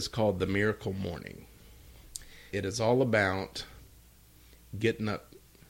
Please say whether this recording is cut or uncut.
cut